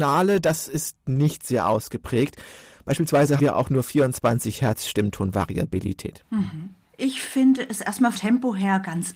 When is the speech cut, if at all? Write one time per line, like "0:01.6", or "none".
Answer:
0:03.4
0:06.8
0:08.1